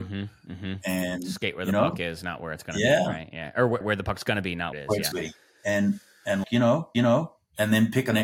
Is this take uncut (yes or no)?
no